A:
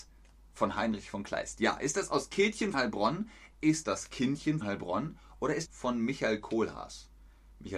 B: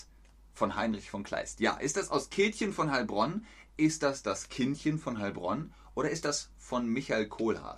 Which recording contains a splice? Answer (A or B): A